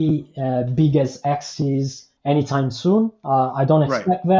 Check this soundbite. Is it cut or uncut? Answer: cut